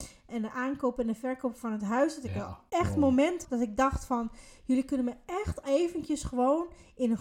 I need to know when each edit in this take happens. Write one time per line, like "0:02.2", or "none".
0:03.4
0:05.6